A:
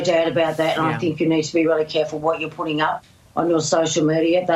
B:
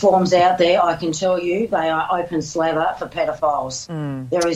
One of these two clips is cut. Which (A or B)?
A